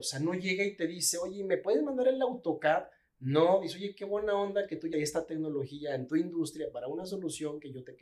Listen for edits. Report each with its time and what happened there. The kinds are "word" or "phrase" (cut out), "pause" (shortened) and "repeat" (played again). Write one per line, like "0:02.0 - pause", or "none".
0:04.9 - word